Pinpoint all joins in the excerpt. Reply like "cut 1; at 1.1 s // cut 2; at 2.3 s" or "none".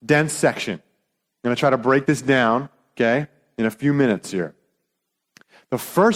none